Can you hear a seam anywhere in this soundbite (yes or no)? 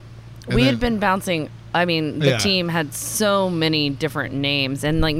no